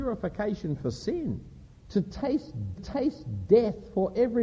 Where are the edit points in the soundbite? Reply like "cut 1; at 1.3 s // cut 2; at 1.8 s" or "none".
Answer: cut 1; at 1.6 s // cut 2; at 2.8 s